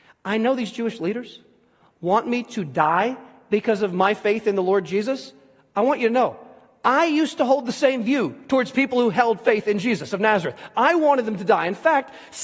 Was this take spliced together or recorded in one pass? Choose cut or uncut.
uncut